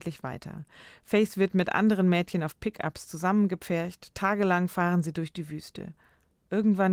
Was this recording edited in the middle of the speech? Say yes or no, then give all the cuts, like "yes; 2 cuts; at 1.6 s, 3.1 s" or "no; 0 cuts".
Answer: no; 0 cuts